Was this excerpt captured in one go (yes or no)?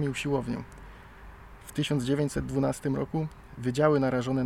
yes